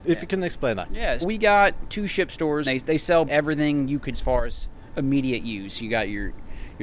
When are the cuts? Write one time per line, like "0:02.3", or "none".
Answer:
0:01.2
0:02.6
0:03.3
0:04.1